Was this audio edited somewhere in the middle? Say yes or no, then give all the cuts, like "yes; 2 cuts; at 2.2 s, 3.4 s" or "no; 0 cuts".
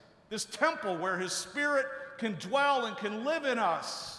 no; 0 cuts